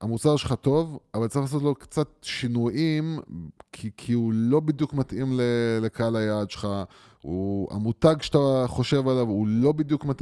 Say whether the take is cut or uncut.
uncut